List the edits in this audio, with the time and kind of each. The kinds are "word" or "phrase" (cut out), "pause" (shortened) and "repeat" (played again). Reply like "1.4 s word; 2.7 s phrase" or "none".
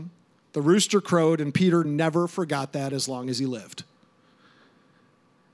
none